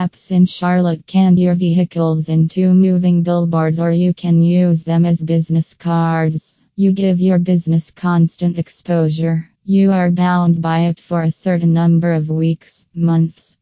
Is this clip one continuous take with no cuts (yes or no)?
no